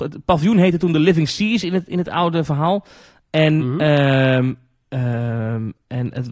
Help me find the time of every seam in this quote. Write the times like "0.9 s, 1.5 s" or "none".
none